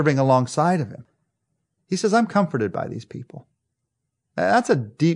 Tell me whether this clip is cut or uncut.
uncut